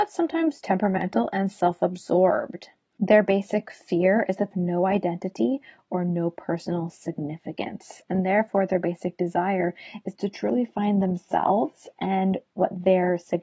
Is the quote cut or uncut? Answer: cut